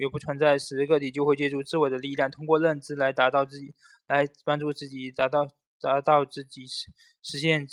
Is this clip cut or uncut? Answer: uncut